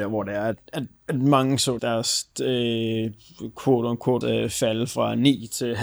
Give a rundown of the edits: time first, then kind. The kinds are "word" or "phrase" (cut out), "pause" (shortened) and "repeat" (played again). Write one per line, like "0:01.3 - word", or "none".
0:01.8 - word
0:04.2 - word